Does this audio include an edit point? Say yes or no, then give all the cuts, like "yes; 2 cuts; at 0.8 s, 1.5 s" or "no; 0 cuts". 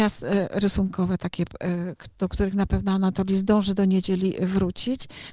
no; 0 cuts